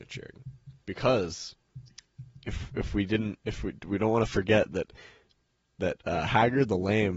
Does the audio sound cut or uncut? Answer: uncut